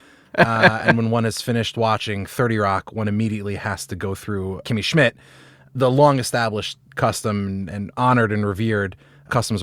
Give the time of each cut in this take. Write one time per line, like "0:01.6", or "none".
none